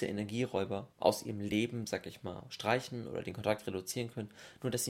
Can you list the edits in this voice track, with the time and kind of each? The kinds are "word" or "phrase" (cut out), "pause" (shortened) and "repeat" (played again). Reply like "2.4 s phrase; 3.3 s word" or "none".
0.9 s pause